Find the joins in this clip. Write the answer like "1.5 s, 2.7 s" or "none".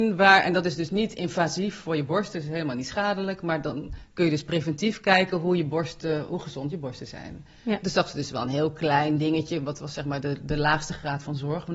none